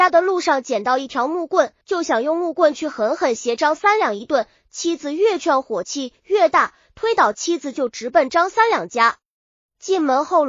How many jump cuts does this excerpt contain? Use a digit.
1